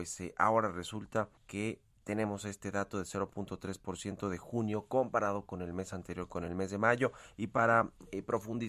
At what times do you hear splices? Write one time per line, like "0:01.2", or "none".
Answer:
0:01.4